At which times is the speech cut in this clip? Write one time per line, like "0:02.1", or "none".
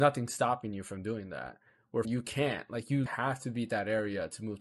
0:02.0
0:03.1